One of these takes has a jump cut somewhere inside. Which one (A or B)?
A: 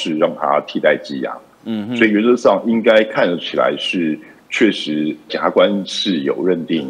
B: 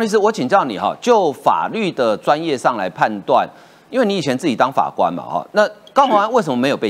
A